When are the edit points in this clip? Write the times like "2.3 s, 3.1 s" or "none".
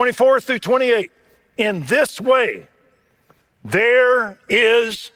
none